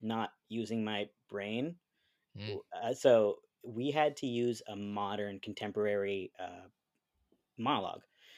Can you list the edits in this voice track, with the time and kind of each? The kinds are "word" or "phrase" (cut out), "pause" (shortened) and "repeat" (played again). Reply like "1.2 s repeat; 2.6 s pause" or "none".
none